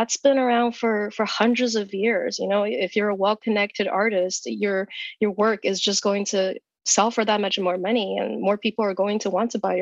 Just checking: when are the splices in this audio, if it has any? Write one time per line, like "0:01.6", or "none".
none